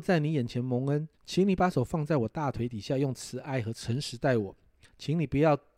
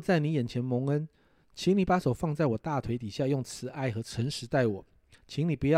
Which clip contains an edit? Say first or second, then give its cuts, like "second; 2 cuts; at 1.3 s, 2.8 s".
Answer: first; 1 cut; at 1.1 s